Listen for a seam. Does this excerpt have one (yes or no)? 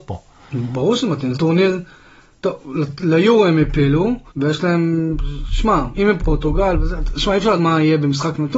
yes